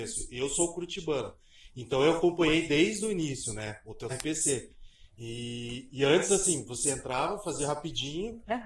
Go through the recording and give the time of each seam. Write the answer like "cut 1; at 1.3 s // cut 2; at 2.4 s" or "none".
cut 1; at 4.1 s